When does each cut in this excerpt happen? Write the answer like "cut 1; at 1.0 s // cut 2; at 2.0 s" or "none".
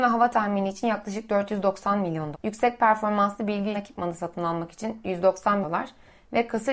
cut 1; at 2.3 s // cut 2; at 3.7 s // cut 3; at 5.6 s